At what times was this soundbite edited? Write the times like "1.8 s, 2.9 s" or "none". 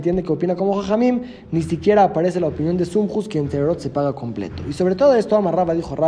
none